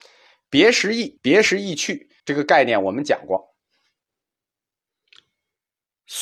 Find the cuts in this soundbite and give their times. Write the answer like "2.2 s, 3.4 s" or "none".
1.2 s, 2.2 s